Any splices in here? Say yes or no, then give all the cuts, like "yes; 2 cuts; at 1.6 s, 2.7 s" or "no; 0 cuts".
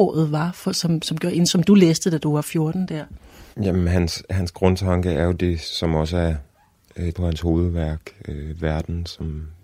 yes; 2 cuts; at 3.5 s, 7.1 s